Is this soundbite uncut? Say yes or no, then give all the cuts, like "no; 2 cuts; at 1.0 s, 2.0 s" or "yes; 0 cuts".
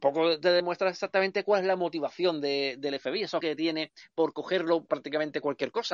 no; 2 cuts; at 3.4 s, 4.9 s